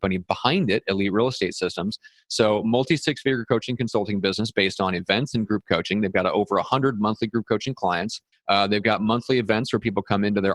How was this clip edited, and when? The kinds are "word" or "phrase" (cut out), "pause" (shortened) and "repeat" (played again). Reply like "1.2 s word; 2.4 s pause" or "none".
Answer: 8.3 s pause

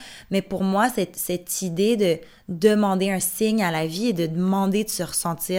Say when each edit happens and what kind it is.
none

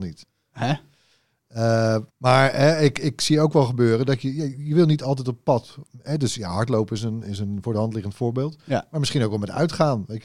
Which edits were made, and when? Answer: 2.1 s pause

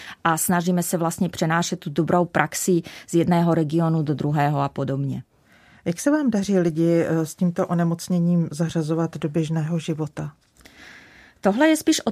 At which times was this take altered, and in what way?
none

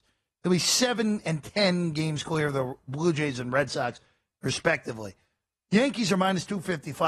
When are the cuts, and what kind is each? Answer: none

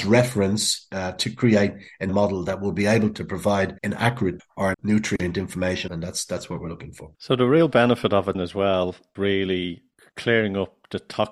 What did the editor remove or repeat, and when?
2.1 s word; 3.8 s pause; 4.4 s word; 4.7 s word; 5.9 s phrase; 7.1 s pause; 8.3 s word; 9.2 s word

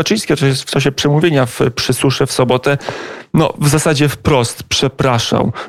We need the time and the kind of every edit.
none

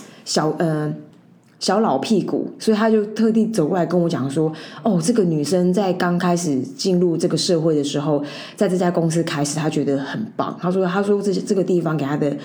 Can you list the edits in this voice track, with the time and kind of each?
none

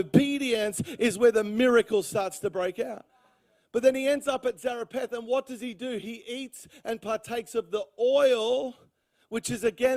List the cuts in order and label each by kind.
none

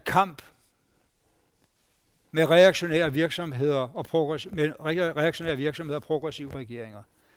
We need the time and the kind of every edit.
none

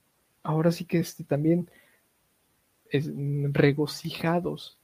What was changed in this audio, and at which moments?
none

